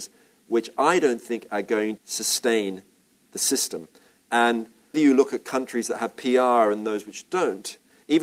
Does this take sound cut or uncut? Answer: cut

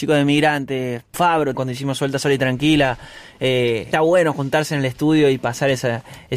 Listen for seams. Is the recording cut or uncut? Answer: cut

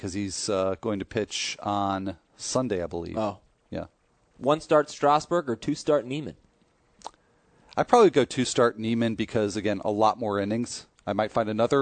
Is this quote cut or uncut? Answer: uncut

